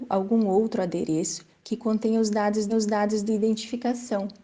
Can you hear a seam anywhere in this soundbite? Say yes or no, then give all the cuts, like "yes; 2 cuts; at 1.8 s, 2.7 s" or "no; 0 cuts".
yes; 1 cut; at 2.7 s